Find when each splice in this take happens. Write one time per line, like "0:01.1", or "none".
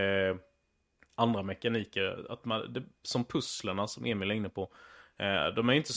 none